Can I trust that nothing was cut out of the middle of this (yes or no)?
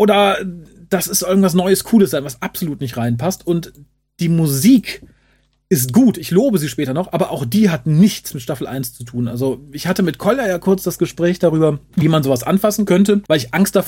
yes